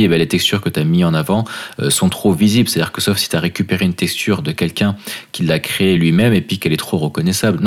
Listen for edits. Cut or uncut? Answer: uncut